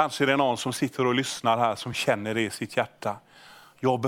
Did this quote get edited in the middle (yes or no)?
no